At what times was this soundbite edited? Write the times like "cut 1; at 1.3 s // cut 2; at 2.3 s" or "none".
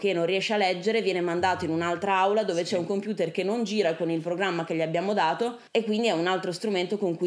cut 1; at 5.7 s